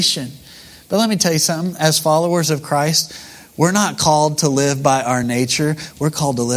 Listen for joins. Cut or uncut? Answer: uncut